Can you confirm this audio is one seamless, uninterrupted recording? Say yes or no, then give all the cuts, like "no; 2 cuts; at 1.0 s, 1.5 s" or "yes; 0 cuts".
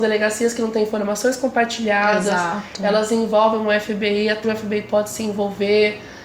no; 1 cut; at 4.4 s